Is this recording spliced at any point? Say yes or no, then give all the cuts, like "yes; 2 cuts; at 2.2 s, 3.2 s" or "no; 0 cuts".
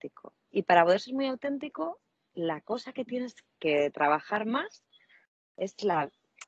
no; 0 cuts